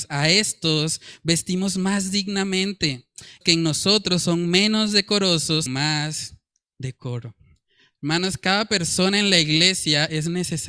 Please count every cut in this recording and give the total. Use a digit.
2